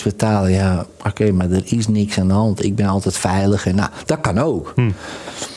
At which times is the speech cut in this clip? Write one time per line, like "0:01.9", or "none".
none

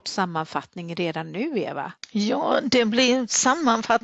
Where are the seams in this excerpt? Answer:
0:02.0

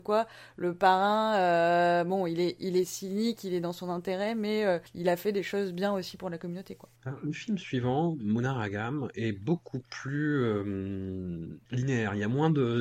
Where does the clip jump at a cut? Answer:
0:04.9
0:07.0
0:11.6

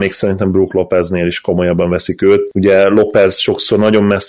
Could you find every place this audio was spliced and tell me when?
none

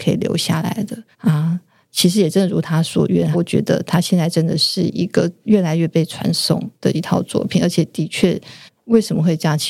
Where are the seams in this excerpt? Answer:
0:01.1
0:03.3
0:06.7
0:08.7

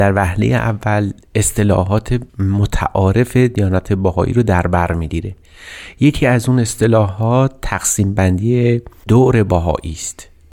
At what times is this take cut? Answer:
0:02.3

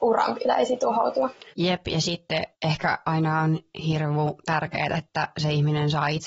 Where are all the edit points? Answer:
0:01.5
0:02.5
0:04.9

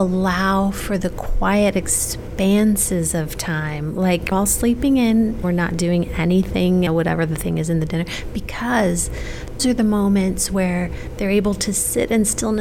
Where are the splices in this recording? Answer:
0:04.3
0:05.4
0:06.9
0:09.6

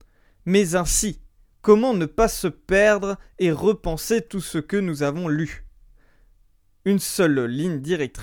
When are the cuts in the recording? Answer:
none

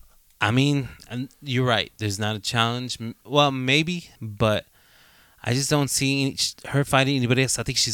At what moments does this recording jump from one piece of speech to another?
0:04.2

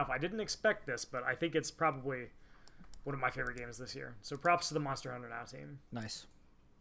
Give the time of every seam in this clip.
0:05.9

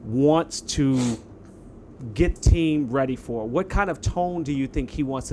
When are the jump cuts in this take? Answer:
0:02.4

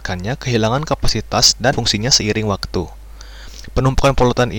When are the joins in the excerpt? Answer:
0:01.7

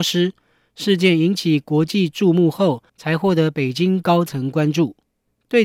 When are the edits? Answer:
0:02.9

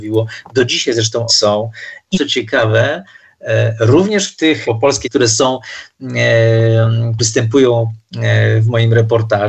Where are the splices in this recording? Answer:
0:01.3
0:02.1
0:04.6
0:05.0
0:07.2

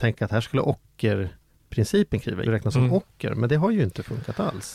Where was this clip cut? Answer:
0:02.5

